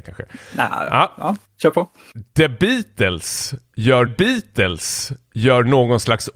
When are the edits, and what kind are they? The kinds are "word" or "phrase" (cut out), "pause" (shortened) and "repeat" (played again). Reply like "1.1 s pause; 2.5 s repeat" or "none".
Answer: 4.1 s repeat